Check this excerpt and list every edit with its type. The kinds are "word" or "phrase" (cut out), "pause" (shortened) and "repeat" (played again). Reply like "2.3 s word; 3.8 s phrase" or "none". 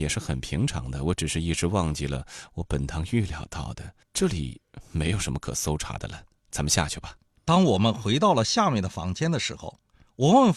4.0 s pause; 7.4 s pause